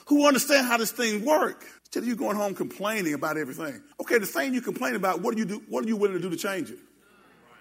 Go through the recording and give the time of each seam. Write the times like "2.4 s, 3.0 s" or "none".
1.8 s, 3.9 s